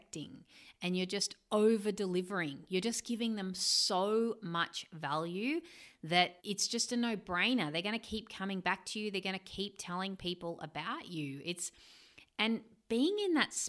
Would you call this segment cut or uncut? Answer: cut